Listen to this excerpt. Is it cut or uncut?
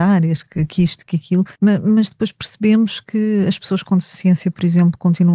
cut